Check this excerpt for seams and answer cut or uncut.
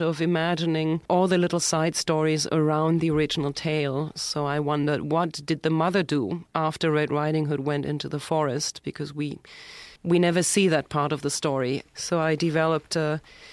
cut